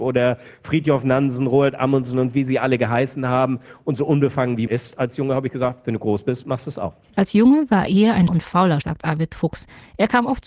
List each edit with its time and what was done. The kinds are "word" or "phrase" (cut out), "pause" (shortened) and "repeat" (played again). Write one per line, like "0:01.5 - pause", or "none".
0:04.7 - word
0:07.9 - word
0:08.3 - word
0:08.8 - word